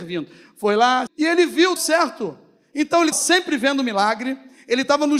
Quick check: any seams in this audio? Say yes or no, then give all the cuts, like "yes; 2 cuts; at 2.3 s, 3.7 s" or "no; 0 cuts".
yes; 3 cuts; at 1.1 s, 1.8 s, 3.1 s